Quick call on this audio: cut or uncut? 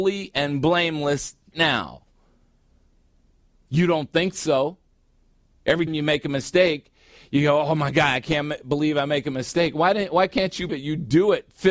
cut